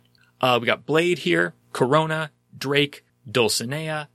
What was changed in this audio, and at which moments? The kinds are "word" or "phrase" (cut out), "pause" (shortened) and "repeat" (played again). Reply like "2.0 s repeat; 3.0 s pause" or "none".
1.6 s pause